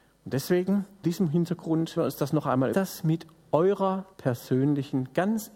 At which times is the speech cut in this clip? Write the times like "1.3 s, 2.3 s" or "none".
1.0 s, 2.0 s, 2.7 s, 4.1 s